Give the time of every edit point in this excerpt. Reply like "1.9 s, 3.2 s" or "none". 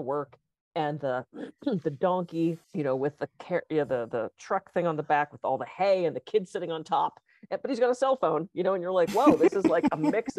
2.6 s